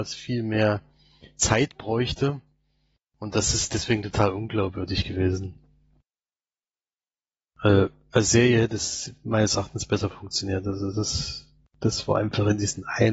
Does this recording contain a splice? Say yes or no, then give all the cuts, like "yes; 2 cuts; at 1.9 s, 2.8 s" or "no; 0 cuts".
no; 0 cuts